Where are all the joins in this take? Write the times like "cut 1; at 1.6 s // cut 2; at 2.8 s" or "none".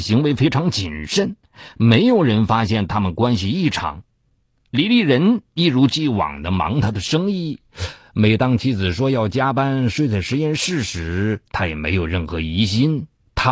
none